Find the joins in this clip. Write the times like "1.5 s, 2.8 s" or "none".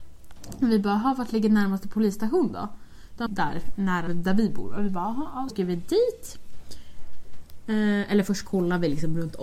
3.3 s, 4.1 s, 5.5 s

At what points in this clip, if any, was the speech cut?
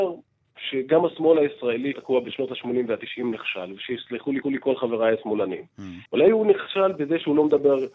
1.9 s, 4.4 s, 6.1 s

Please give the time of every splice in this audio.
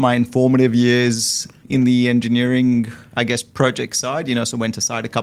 1.6 s

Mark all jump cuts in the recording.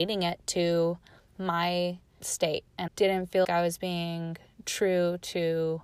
2.2 s, 2.9 s, 3.4 s

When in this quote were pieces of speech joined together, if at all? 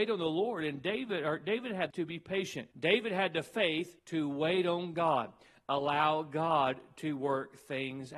1.9 s, 2.7 s, 4.0 s

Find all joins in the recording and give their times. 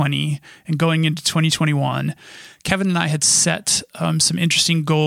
none

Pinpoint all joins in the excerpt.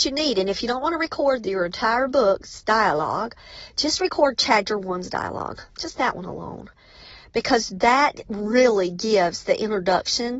5.7 s

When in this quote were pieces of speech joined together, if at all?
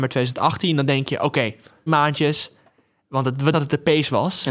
1.9 s, 3.5 s

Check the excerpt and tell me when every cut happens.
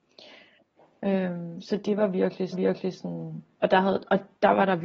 2.5 s

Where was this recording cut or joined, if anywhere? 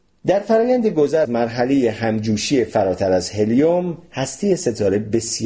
1.2 s

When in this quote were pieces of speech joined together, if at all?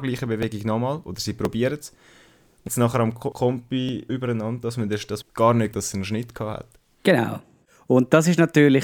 2.7 s, 3.3 s, 4.1 s, 5.2 s, 5.7 s

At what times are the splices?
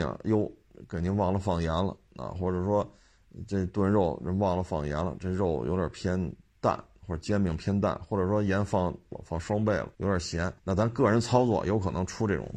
9.1 s, 9.9 s, 10.6 s

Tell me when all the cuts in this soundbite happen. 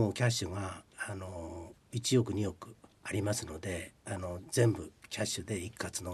2.9 s, 4.0 s

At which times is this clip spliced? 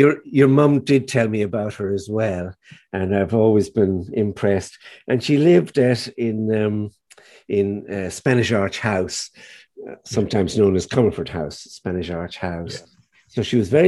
none

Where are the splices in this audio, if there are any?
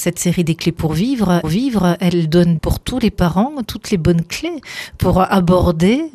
1.4 s, 2.6 s

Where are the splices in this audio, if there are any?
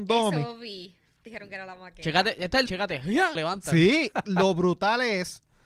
1.3 s, 2.7 s, 3.4 s, 4.1 s

